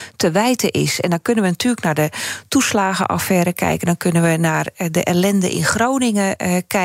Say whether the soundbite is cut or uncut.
uncut